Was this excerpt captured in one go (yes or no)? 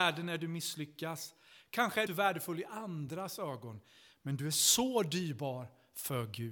no